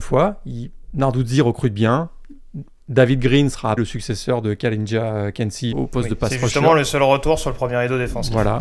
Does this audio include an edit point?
yes; 2 cuts; at 3.8 s, 5.7 s

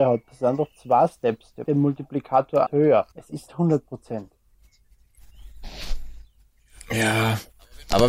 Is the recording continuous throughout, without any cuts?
no; 4 cuts; at 1.6 s, 2.7 s, 3.1 s, 3.5 s

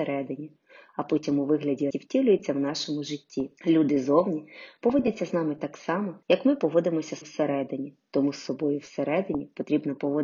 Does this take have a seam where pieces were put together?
yes; 4 cuts; at 1.9 s, 3.6 s, 6.2 s, 7.2 s

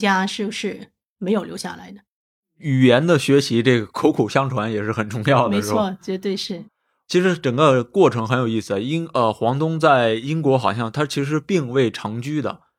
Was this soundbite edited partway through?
no; 0 cuts

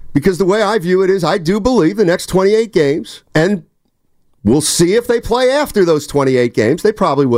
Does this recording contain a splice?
yes; 1 cut; at 3.3 s

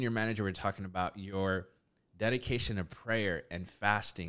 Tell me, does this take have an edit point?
no; 0 cuts

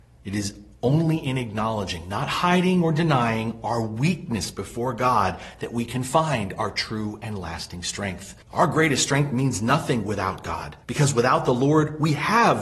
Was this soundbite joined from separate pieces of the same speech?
yes; 2 cuts; at 8.4 s, 10.8 s

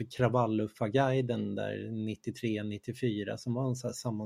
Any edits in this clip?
no; 0 cuts

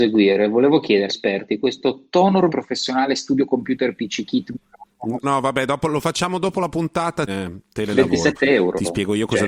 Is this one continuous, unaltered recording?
no; 4 cuts; at 1.1 s, 2.5 s, 5.2 s, 7.3 s

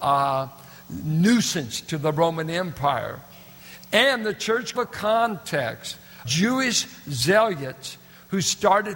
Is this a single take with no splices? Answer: no; 2 cuts; at 4.7 s, 6.2 s

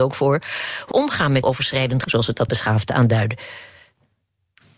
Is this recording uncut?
no; 4 cuts; at 0.9 s, 1.4 s, 2.0 s, 2.5 s

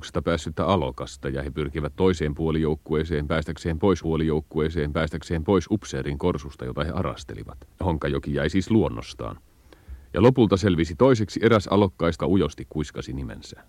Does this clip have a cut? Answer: yes; 3 cuts; at 4.0 s, 7.7 s, 12.2 s

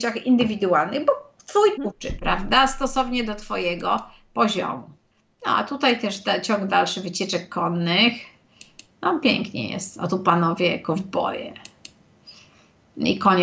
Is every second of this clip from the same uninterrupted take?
no; 2 cuts; at 1.8 s, 5.1 s

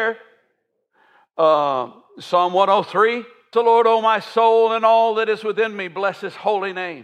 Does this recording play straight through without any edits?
no; 1 cut; at 3.5 s

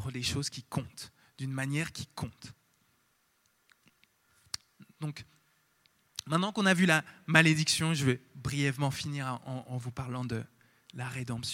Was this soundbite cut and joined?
no; 0 cuts

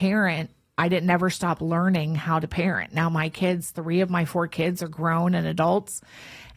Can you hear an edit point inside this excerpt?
no; 0 cuts

